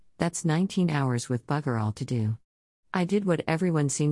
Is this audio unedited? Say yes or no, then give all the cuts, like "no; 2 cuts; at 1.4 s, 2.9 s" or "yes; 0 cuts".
yes; 0 cuts